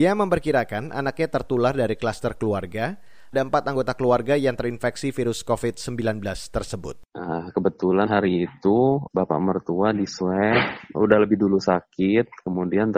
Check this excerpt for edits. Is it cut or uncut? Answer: cut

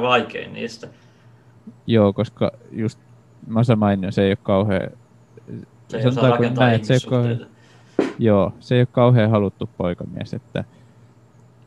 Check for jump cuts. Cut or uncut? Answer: uncut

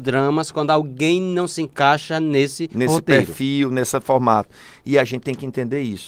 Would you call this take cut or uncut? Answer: uncut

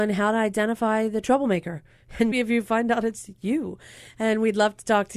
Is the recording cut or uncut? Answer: cut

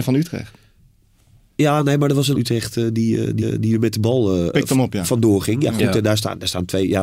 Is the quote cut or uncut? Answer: cut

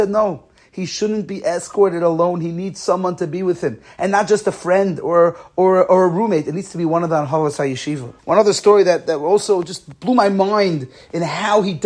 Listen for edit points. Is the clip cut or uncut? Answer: cut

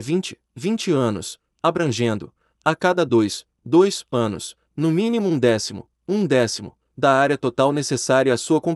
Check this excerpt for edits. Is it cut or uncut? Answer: uncut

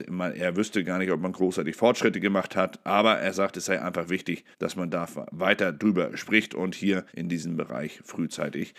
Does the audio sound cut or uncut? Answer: cut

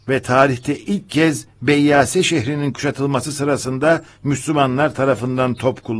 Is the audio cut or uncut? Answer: uncut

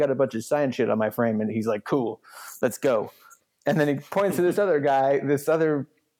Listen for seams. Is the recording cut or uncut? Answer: uncut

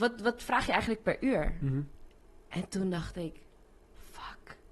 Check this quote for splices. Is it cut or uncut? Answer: uncut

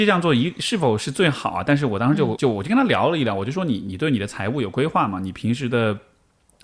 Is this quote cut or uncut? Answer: cut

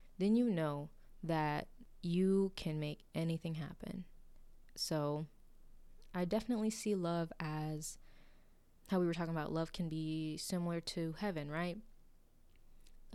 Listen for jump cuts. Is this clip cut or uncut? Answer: uncut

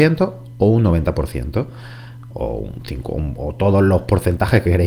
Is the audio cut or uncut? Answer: uncut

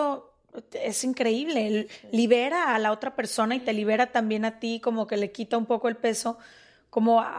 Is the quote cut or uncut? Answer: uncut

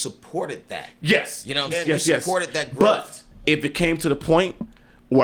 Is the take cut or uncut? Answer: cut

